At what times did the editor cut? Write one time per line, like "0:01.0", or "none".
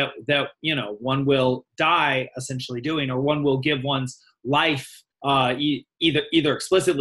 0:05.1